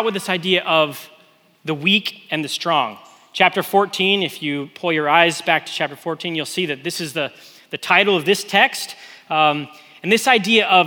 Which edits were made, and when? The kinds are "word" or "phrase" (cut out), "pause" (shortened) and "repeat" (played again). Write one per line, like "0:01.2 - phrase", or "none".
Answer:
none

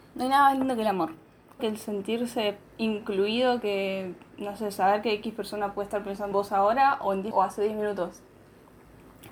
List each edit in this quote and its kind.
0:01.6 - phrase
0:02.7 - pause
0:06.3 - word
0:07.3 - word

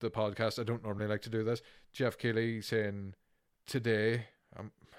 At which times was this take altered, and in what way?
none

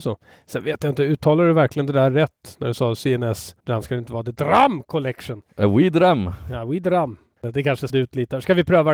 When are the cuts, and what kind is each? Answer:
0:03.6 - pause
0:07.9 - word

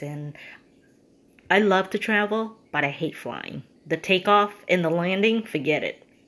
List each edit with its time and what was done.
0:03.8 - pause

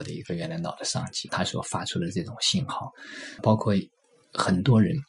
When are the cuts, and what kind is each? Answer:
0:01.3 - word
0:03.4 - word

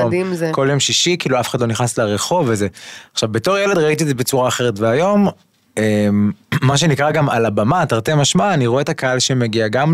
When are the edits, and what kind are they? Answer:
none

